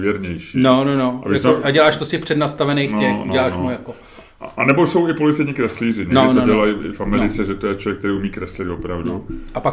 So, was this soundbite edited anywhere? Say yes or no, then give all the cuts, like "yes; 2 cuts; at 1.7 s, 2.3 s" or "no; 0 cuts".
no; 0 cuts